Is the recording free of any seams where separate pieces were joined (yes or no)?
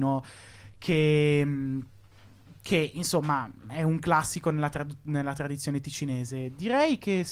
yes